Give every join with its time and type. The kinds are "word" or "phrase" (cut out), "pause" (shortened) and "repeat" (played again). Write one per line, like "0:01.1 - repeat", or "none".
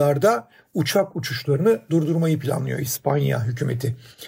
none